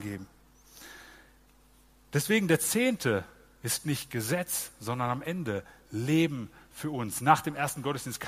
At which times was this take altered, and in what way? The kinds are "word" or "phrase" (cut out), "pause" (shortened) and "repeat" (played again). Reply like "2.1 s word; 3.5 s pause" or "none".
none